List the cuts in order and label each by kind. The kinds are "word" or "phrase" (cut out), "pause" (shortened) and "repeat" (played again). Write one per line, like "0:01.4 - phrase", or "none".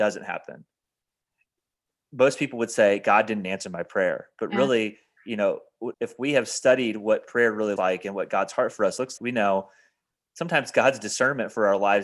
0:05.9 - word
0:07.8 - word
0:09.2 - word